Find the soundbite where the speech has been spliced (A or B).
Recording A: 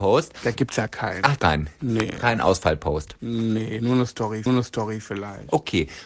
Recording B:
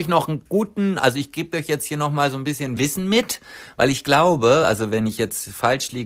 A